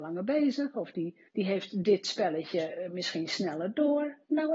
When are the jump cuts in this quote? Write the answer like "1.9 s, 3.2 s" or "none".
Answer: 1.3 s